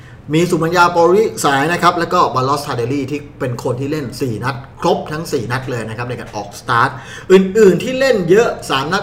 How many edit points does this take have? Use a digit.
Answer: 1